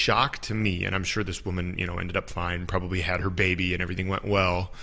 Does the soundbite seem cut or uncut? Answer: uncut